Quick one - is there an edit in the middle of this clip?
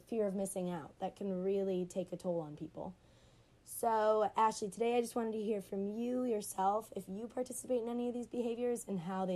no; 0 cuts

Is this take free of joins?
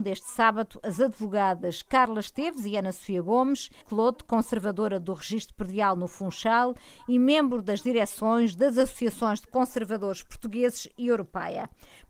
no; 1 cut; at 3.8 s

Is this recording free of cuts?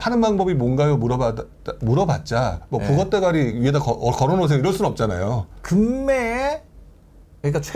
yes; 0 cuts

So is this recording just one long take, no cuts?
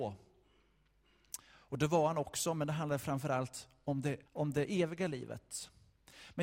no; 1 cut; at 4.3 s

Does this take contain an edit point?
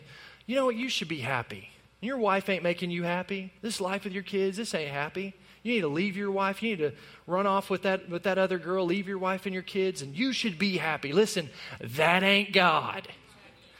yes; 1 cut; at 3.6 s

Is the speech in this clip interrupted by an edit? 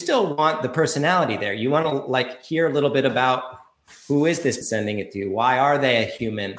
yes; 1 cut; at 4.6 s

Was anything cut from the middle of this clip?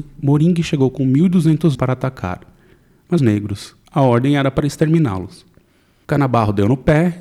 yes; 3 cuts; at 1.7 s, 3.2 s, 3.8 s

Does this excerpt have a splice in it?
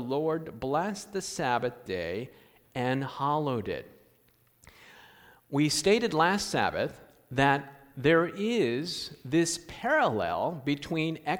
no; 0 cuts

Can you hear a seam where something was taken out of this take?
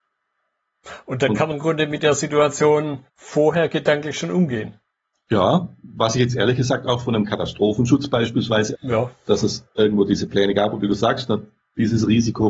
yes; 4 cuts; at 1.5 s, 3.1 s, 4.9 s, 8.7 s

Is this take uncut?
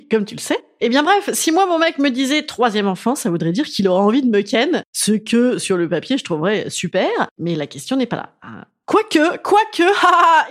yes; 0 cuts

